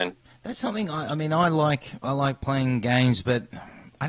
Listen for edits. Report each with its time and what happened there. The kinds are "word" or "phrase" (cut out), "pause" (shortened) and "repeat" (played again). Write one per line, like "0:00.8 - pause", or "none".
none